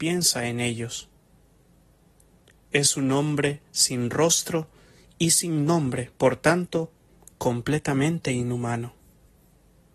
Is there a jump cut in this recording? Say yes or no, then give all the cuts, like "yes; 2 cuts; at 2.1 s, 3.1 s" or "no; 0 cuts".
yes; 1 cut; at 6.2 s